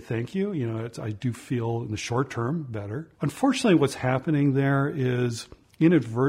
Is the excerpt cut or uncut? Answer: cut